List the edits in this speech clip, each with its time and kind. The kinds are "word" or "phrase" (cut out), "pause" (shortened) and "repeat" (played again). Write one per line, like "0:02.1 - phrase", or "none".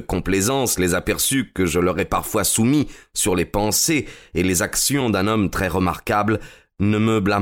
none